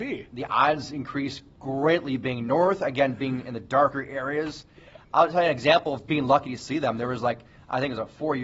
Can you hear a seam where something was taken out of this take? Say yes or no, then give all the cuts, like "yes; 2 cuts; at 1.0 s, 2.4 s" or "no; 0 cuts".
yes; 1 cut; at 6.1 s